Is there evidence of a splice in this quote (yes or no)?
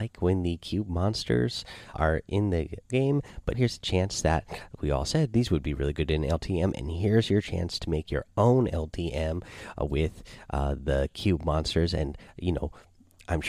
yes